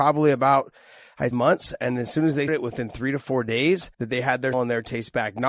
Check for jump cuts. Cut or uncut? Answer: cut